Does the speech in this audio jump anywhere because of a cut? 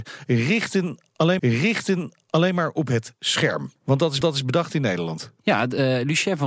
yes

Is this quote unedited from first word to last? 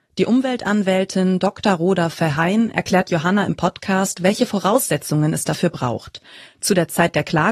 yes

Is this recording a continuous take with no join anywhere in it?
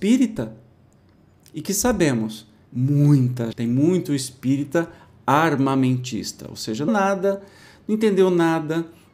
no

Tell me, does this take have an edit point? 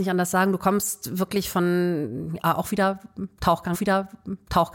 yes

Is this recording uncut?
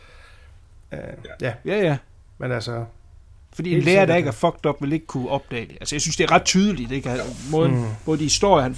yes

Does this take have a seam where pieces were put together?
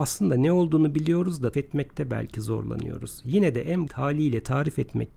yes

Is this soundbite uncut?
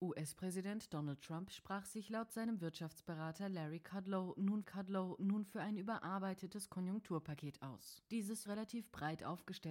no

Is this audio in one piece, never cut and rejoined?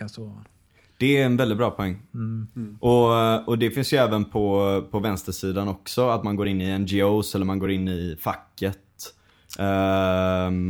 yes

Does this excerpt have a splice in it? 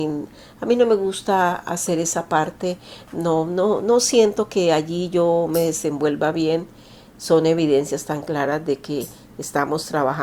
no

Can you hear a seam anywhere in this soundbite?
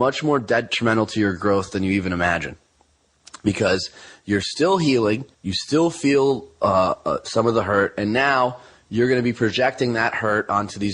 yes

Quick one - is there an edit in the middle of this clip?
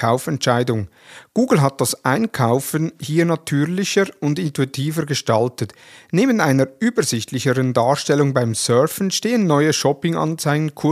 no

